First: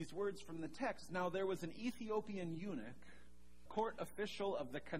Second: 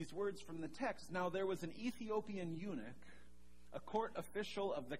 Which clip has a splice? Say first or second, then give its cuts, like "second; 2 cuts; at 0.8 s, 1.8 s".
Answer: first; 1 cut; at 3.7 s